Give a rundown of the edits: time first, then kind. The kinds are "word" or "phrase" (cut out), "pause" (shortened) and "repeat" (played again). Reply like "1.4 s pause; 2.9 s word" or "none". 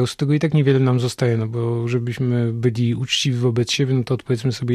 none